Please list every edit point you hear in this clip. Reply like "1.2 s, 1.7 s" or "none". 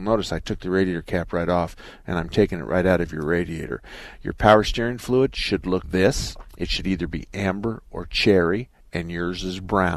5.8 s